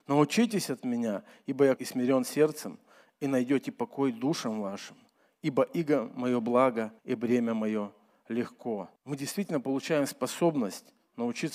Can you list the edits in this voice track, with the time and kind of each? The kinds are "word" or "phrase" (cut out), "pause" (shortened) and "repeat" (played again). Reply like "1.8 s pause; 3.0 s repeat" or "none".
1.8 s word; 7.0 s pause; 9.0 s pause